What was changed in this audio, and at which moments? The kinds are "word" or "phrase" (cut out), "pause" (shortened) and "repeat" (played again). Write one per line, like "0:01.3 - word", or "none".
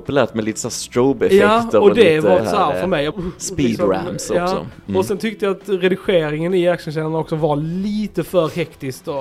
0:02.4 - word
0:03.1 - phrase